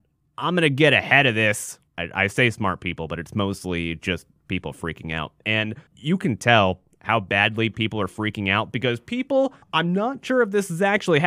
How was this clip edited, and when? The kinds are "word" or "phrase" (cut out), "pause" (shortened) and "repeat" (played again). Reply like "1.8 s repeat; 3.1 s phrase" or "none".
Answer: 1.9 s pause; 5.9 s pause; 9.6 s pause